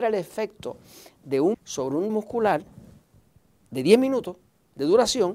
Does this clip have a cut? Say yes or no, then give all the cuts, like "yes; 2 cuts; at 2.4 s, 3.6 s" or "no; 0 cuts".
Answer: yes; 2 cuts; at 1.5 s, 2.1 s